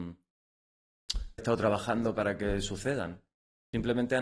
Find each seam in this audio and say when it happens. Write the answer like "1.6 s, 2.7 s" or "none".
1.4 s